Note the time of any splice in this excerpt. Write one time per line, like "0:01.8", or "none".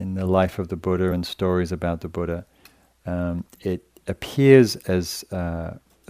none